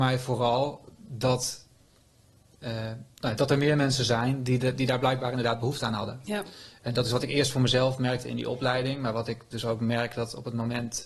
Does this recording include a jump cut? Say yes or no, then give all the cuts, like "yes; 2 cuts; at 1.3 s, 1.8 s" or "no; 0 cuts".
no; 0 cuts